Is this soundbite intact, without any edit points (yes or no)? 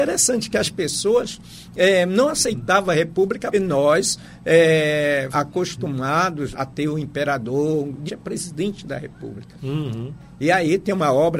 no